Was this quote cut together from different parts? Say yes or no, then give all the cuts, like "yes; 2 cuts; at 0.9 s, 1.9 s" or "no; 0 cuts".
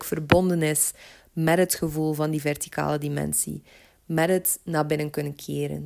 no; 0 cuts